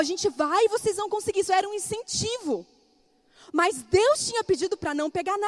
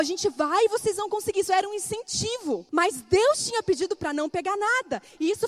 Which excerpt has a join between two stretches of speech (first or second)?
second